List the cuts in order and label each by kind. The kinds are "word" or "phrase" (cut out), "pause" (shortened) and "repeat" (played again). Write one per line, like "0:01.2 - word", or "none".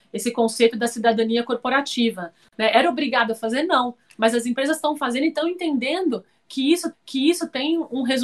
0:06.9 - repeat